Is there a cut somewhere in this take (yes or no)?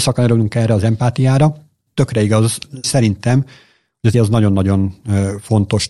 yes